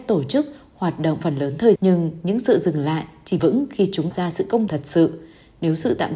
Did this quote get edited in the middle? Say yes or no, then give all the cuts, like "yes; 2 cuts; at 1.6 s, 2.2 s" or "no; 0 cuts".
yes; 5 cuts; at 1.2 s, 1.8 s, 3.4 s, 4.1 s, 4.7 s